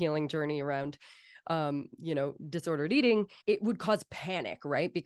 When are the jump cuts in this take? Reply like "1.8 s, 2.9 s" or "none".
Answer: 3.4 s